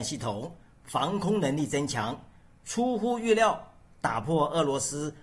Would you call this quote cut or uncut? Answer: uncut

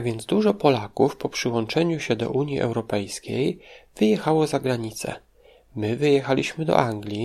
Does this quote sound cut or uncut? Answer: uncut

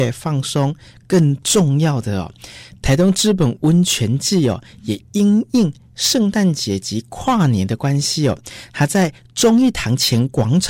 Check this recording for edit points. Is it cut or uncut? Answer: uncut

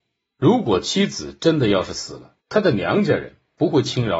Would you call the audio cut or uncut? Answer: cut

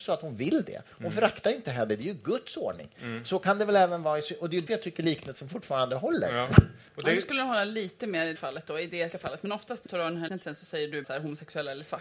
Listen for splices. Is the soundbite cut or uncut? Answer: cut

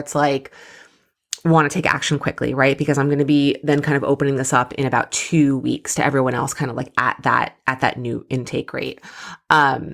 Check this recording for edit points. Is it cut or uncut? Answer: uncut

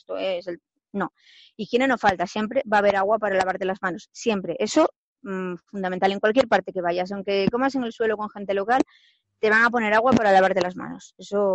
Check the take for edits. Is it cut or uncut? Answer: uncut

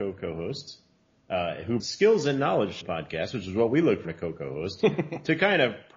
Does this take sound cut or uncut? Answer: cut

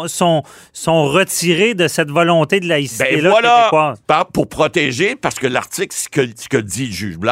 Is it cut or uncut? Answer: uncut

